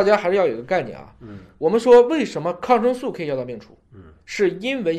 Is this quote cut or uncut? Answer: uncut